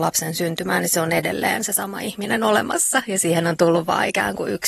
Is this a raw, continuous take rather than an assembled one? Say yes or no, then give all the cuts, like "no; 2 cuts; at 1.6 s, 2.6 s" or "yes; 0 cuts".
yes; 0 cuts